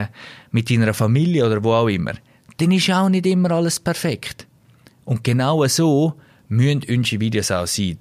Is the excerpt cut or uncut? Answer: uncut